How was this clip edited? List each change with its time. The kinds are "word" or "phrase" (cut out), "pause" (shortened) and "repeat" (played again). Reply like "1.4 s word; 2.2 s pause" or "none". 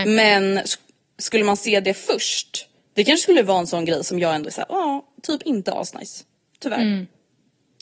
none